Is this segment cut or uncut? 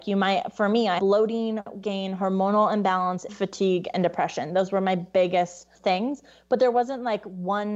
cut